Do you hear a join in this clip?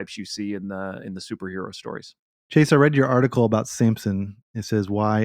no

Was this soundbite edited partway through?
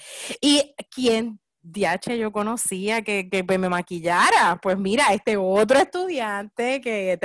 yes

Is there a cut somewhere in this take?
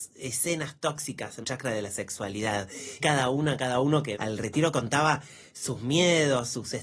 yes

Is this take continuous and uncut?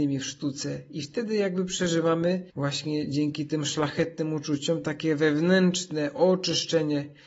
no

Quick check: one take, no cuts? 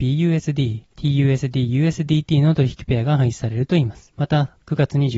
yes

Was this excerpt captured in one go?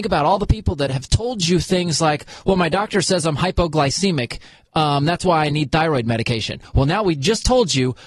yes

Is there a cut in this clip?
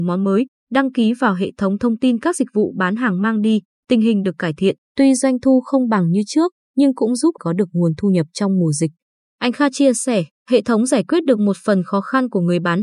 yes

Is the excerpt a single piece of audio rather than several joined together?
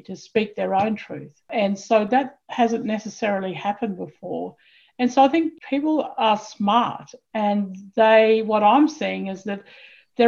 yes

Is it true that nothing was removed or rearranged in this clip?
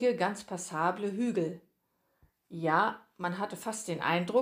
yes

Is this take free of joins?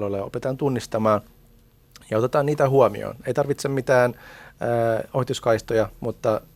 yes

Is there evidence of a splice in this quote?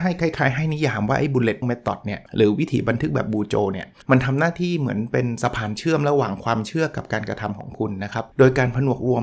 yes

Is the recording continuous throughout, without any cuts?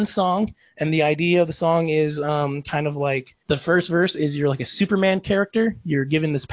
no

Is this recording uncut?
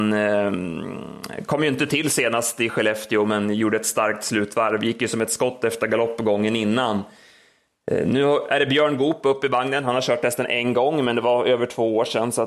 yes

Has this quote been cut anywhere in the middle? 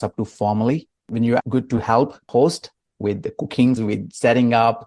yes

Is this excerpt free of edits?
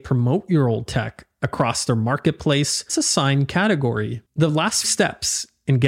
no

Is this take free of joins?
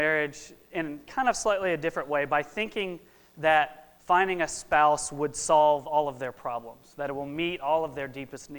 no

